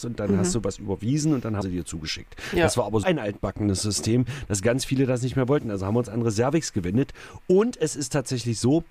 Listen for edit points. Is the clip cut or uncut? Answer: cut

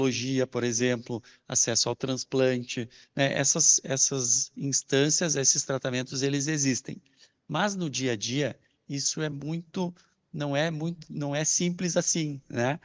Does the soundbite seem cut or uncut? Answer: uncut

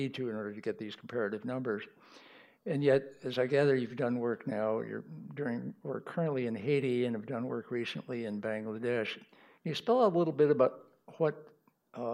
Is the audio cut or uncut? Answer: uncut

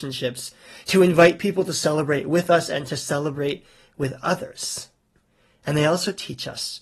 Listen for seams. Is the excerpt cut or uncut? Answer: uncut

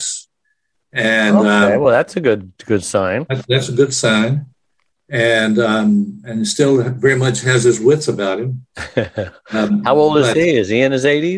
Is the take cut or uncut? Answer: uncut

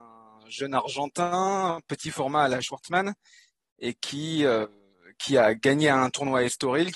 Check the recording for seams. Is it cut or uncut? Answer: uncut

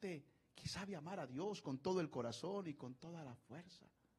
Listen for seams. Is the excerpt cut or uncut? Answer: uncut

